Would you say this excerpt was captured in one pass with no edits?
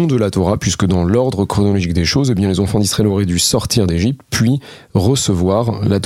yes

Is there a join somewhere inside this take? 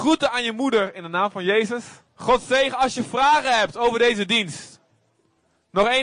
yes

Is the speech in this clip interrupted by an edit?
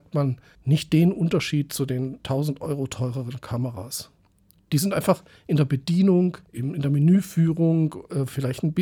yes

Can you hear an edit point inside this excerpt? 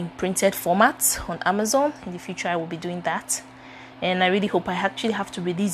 no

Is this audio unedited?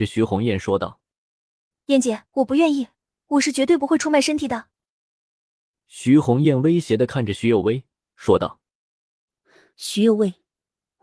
no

